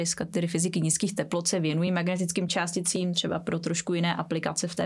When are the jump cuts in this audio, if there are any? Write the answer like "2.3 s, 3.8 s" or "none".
none